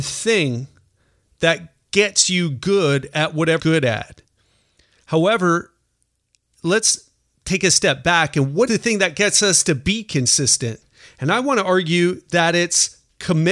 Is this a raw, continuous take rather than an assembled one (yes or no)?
no